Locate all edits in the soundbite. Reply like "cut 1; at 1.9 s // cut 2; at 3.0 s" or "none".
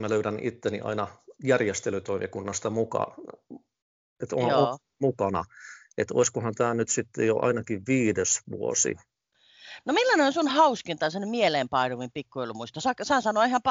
none